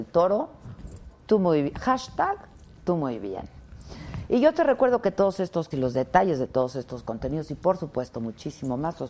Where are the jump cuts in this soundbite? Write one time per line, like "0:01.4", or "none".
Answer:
0:05.7